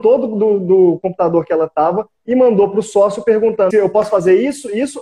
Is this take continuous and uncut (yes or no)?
no